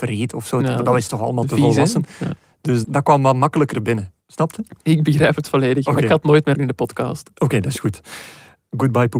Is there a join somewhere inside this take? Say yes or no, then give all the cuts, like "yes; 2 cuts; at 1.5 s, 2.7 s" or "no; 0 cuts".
yes; 3 cuts; at 2.8 s, 4.2 s, 6.5 s